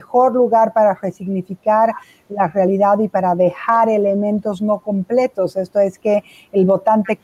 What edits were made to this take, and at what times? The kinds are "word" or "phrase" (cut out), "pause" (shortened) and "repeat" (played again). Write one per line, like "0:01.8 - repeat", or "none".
none